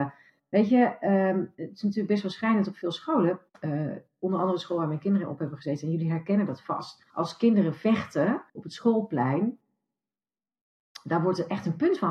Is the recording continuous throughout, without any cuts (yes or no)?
no